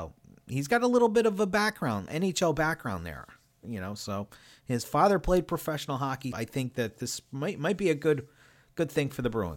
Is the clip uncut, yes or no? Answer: no